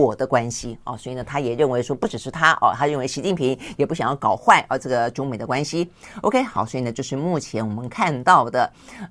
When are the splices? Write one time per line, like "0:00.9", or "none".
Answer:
none